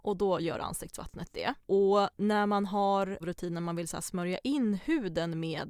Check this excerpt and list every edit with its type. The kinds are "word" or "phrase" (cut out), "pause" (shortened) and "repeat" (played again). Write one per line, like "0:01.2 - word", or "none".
0:01.6 - pause
0:03.2 - phrase